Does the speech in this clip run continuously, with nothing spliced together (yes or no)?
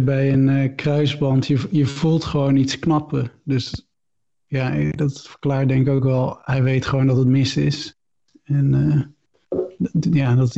yes